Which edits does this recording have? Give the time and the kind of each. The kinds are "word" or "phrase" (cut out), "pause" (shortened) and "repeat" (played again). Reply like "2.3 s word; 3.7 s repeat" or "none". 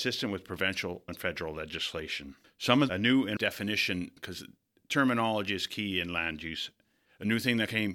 1.1 s word; 2.4 s pause; 2.9 s phrase; 3.4 s word; 4.2 s word